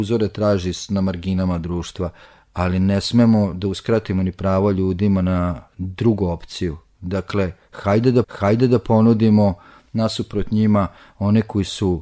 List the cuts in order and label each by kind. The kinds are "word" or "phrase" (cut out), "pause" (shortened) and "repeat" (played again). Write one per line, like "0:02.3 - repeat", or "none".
0:02.3 - pause
0:05.7 - pause
0:08.2 - repeat